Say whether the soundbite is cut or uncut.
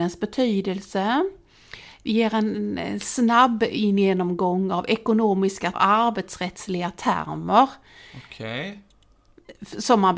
cut